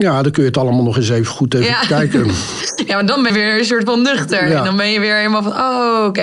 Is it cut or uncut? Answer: cut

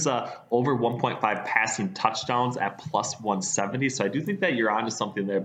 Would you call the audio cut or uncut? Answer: uncut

